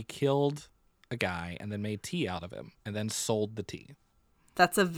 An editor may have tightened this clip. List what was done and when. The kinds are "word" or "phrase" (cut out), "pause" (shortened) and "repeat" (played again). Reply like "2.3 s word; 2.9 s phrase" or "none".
2.8 s pause